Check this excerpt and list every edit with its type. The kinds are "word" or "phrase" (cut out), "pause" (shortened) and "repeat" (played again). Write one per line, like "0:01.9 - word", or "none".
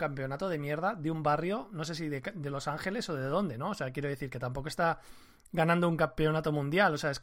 none